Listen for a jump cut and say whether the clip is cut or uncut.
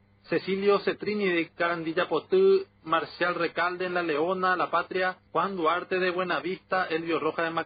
cut